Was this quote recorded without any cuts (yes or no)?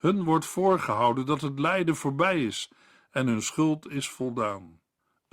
yes